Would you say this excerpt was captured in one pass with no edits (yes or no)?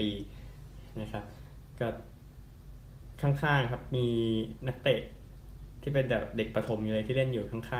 yes